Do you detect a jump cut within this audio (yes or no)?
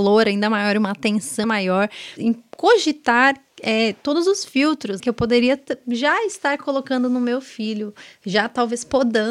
yes